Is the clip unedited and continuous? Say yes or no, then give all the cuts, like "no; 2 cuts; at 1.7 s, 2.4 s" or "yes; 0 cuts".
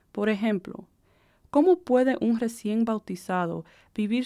yes; 0 cuts